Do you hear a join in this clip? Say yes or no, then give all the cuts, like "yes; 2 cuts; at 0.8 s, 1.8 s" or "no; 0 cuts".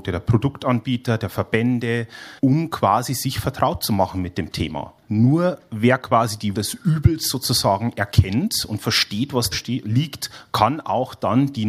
yes; 5 cuts; at 2.4 s, 5.0 s, 6.5 s, 9.5 s, 9.8 s